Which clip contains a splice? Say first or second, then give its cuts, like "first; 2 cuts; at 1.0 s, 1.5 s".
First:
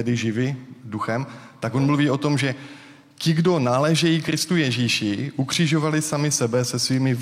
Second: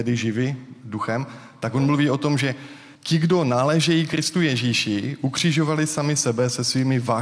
second; 1 cut; at 2.9 s